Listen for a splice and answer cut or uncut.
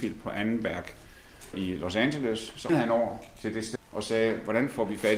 cut